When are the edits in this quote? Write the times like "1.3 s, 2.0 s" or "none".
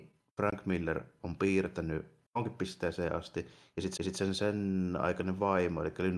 2.3 s, 4.0 s